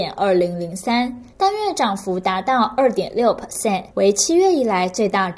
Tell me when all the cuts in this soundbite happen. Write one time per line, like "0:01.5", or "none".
0:01.3
0:03.9